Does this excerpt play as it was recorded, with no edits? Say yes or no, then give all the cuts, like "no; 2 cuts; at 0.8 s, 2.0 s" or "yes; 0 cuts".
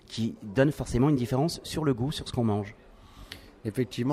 yes; 0 cuts